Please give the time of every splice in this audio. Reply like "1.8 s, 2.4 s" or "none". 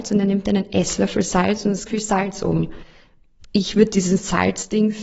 1.9 s